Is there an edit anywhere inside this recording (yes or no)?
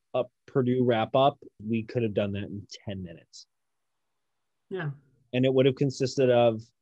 yes